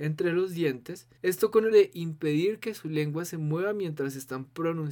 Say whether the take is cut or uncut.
cut